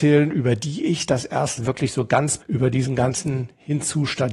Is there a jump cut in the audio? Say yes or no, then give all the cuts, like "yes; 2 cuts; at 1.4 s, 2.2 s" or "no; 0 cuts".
yes; 2 cuts; at 1.6 s, 2.4 s